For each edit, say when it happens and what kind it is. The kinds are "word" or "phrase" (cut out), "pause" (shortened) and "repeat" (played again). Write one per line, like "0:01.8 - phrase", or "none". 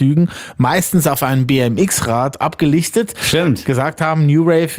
none

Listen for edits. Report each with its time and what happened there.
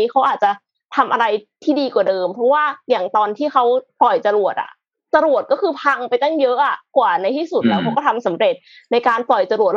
0:03.9 - pause

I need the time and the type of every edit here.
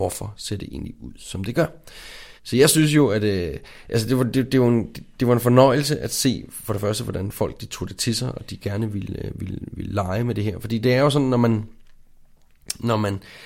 0:02.4 - pause

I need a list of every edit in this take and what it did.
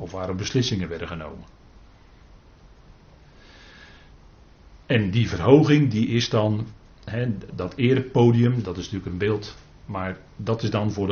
0:07.5 - word
0:08.6 - word

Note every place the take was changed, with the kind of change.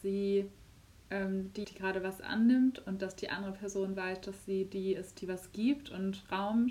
0:01.6 - word

